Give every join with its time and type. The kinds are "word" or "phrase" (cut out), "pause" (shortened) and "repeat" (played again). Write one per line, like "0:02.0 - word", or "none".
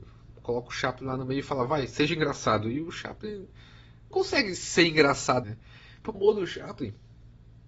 0:04.1 - word
0:05.4 - word
0:06.1 - word

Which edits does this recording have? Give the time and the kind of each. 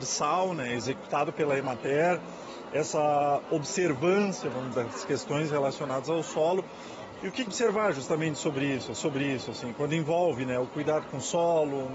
0:04.7 - word
0:07.5 - phrase
0:08.9 - repeat

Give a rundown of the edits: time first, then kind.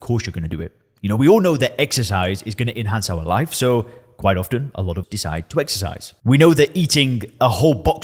0:05.0 - word

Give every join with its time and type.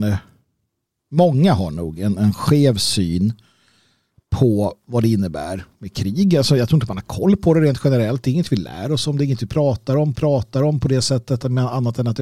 0:10.1 - repeat

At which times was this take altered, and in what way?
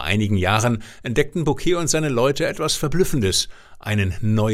none

